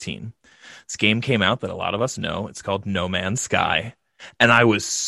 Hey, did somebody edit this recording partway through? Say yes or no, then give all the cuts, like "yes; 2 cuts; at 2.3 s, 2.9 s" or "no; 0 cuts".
no; 0 cuts